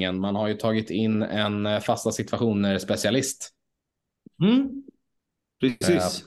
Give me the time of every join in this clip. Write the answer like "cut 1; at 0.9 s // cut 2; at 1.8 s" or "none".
none